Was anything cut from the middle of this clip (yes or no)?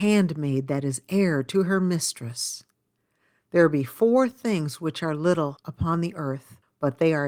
no